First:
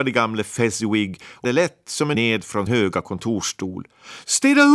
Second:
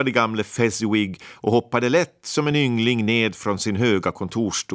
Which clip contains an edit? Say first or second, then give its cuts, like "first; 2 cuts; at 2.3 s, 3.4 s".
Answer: first; 3 cuts; at 1.4 s, 2.1 s, 2.7 s